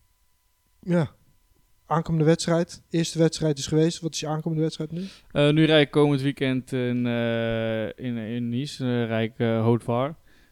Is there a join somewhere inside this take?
no; 0 cuts

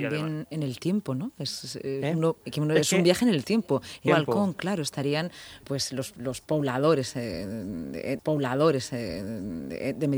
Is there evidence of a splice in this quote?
yes; 3 cuts; at 4.1 s, 5.6 s, 8.2 s

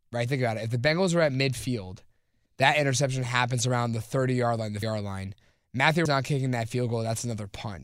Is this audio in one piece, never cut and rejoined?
no; 3 cuts; at 2.5 s, 4.8 s, 6.1 s

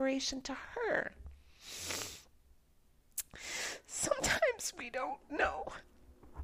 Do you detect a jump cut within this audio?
no; 0 cuts

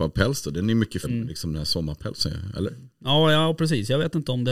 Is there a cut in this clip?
yes; 1 cut; at 1.0 s

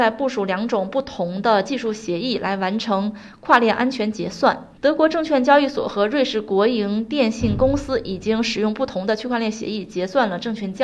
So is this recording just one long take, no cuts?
no; 1 cut; at 4.8 s

